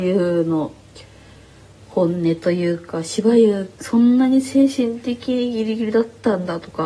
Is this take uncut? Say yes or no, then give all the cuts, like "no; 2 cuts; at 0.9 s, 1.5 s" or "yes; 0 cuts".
no; 1 cut; at 3.8 s